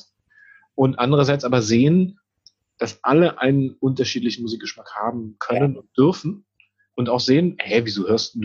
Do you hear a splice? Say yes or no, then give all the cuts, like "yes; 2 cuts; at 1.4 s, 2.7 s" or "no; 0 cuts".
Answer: no; 0 cuts